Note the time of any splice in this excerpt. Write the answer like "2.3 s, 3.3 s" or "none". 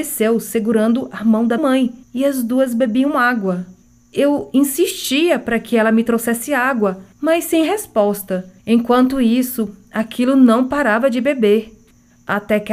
1.6 s, 2.0 s, 7.1 s, 8.6 s